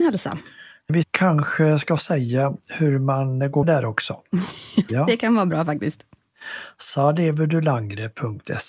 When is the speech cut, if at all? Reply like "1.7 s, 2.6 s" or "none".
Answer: 3.6 s, 4.9 s